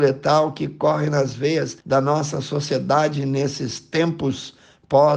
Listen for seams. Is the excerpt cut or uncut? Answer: cut